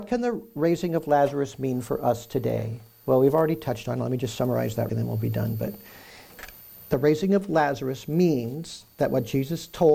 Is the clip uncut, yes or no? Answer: no